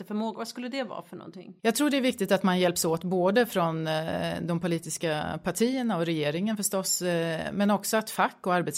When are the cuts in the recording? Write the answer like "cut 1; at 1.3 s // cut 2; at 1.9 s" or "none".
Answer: cut 1; at 1.6 s